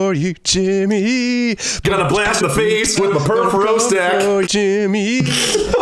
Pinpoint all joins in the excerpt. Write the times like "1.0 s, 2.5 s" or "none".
2.4 s, 3.0 s, 4.4 s